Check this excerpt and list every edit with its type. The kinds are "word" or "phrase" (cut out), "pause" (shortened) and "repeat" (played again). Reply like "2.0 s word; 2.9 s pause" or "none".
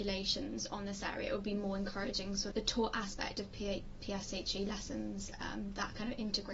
2.5 s word